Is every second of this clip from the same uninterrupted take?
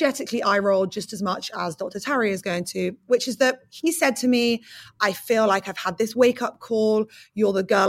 yes; 0 cuts

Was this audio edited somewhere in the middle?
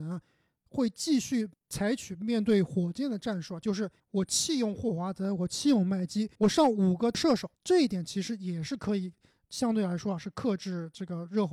yes; 3 cuts; at 4.0 s, 6.4 s, 7.6 s

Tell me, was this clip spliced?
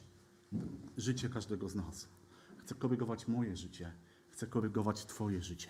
no; 0 cuts

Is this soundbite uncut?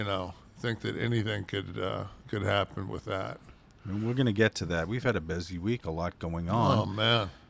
yes; 0 cuts

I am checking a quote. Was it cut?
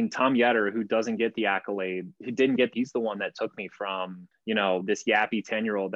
yes; 2 cuts; at 2.7 s, 4.3 s

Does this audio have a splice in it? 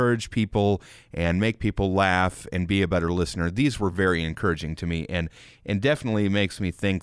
no; 0 cuts

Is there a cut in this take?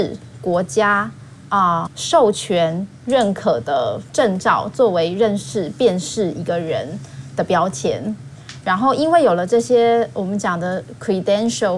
yes; 1 cut; at 1.9 s

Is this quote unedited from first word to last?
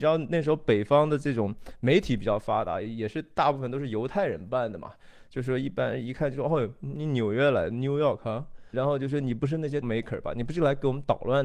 no; 2 cuts; at 8.7 s, 9.8 s

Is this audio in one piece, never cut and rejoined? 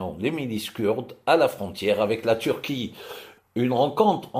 yes; 0 cuts

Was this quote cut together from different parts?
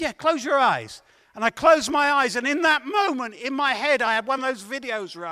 no; 0 cuts

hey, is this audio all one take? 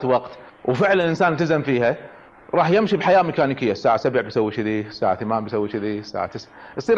yes; 0 cuts

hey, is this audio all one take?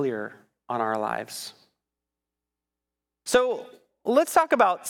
yes; 0 cuts

